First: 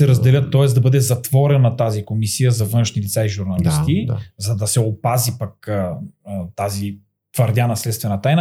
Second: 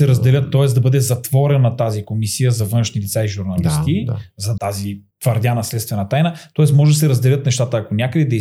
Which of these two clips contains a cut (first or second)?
second